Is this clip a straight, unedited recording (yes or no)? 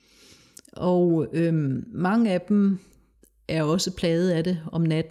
yes